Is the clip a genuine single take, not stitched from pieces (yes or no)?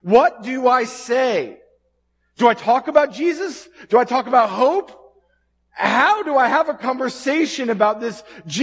yes